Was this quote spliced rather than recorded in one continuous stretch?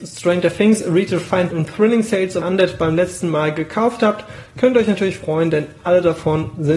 yes; 2 cuts; at 1.5 s, 2.4 s

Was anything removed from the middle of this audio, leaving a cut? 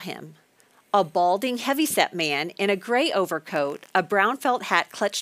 no; 0 cuts

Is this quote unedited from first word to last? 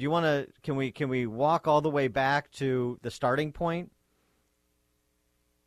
yes; 0 cuts

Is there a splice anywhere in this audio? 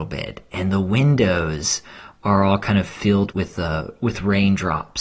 yes; 1 cut; at 3.3 s

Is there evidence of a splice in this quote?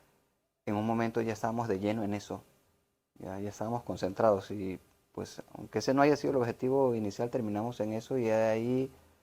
no; 0 cuts

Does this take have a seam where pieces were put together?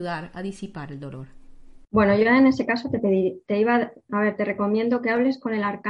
yes; 1 cut; at 1.8 s

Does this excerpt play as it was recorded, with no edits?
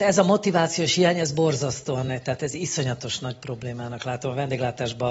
yes; 0 cuts

